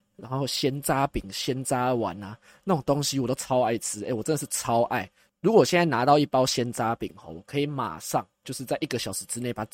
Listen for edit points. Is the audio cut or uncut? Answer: uncut